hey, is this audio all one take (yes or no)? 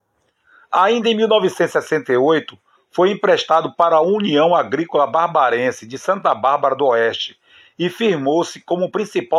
yes